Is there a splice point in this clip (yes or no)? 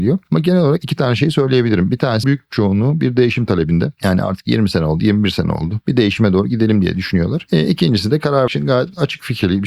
yes